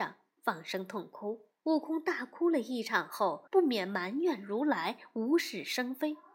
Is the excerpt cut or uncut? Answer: cut